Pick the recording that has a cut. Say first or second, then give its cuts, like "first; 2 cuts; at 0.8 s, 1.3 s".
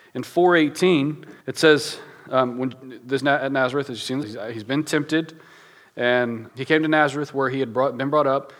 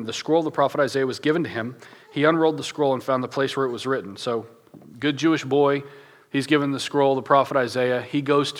first; 4 cuts; at 1.4 s, 3.2 s, 4.2 s, 6.5 s